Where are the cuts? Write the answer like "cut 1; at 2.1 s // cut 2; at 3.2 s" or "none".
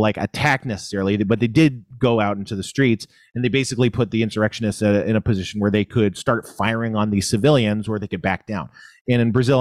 none

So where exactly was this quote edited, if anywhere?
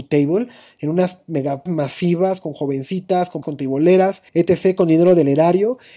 cut 1; at 1.7 s // cut 2; at 3.4 s // cut 3; at 4.3 s

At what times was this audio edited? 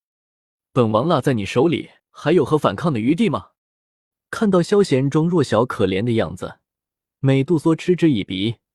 cut 1; at 2.0 s // cut 2; at 3.6 s

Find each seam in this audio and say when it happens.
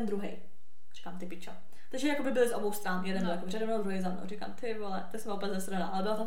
none

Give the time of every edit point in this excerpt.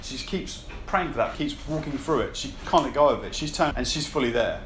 cut 1; at 1.3 s // cut 2; at 2.6 s // cut 3; at 3.7 s

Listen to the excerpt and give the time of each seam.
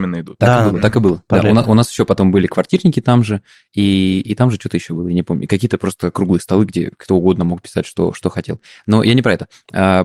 none

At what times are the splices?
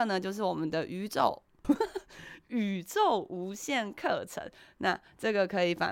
cut 1; at 1.6 s

